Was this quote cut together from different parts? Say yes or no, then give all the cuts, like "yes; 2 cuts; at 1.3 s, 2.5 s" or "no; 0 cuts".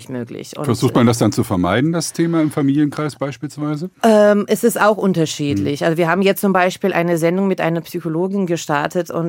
no; 0 cuts